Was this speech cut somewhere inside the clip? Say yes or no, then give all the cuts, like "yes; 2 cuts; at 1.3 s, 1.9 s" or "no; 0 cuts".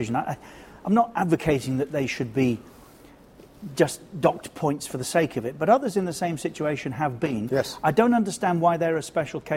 no; 0 cuts